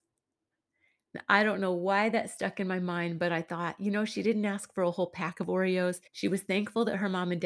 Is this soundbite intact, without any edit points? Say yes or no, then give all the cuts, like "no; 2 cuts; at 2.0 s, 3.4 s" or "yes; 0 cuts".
no; 1 cut; at 6.1 s